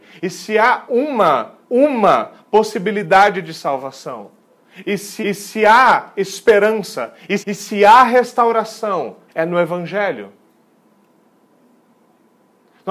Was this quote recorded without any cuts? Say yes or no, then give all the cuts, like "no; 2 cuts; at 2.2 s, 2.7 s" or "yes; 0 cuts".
no; 4 cuts; at 1.6 s, 5.2 s, 7.4 s, 9.3 s